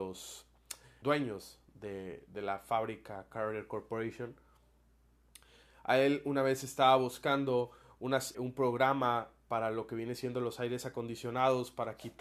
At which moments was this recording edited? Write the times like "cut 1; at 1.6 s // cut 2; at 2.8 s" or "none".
cut 1; at 1.0 s // cut 2; at 8.3 s